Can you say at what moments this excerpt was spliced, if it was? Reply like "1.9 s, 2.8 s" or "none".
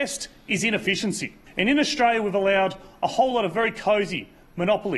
none